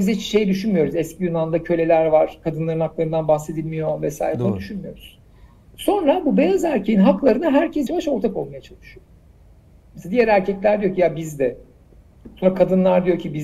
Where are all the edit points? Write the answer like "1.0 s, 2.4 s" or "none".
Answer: 7.9 s